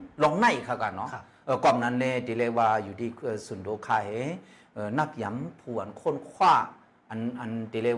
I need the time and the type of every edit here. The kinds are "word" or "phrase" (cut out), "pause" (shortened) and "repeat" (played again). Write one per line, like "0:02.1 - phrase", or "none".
none